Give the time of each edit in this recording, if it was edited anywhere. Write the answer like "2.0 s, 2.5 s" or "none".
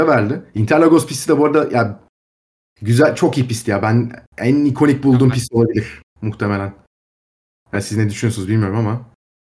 none

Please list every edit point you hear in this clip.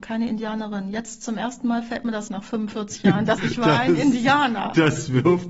2.3 s, 3.4 s

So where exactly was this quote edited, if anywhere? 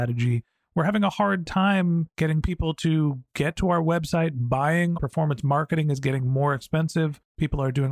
5.0 s

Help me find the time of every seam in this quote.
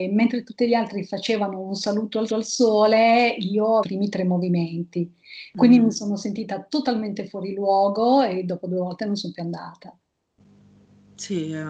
2.3 s, 3.8 s

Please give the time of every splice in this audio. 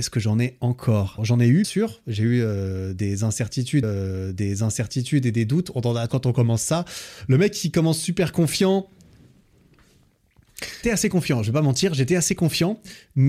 1.2 s, 1.6 s, 3.8 s, 6.1 s, 10.8 s

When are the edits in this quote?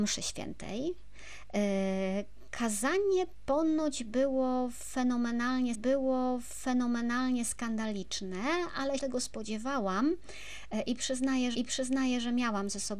5.7 s, 9.0 s, 11.5 s

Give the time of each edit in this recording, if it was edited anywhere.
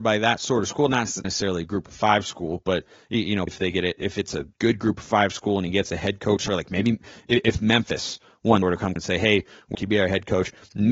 1.2 s, 3.5 s, 4.5 s, 6.5 s, 8.6 s, 9.0 s, 9.7 s

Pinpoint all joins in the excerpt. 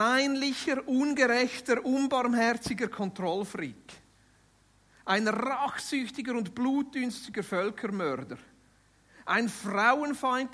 none

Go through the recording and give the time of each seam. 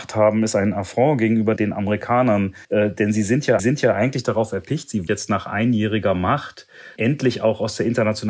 1.6 s, 2.6 s, 3.6 s, 5.1 s, 7.0 s

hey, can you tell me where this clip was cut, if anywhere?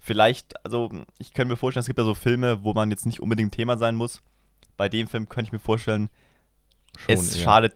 none

